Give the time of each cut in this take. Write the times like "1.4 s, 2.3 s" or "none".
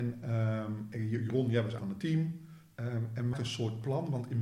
1.8 s, 3.3 s